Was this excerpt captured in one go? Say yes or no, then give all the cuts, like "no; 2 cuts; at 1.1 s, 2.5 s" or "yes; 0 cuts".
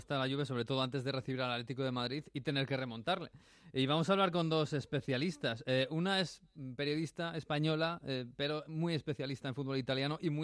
yes; 0 cuts